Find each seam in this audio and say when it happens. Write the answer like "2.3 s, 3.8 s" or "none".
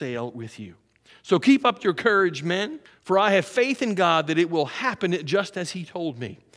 2.9 s